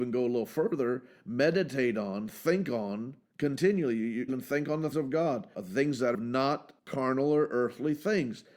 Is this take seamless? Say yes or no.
no